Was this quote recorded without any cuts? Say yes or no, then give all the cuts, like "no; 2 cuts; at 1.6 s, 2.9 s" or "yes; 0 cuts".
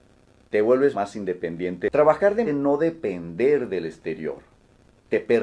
no; 2 cuts; at 0.9 s, 2.5 s